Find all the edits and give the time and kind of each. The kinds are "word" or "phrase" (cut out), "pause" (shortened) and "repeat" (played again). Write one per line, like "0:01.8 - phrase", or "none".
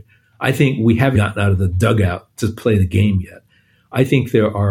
0:01.1 - word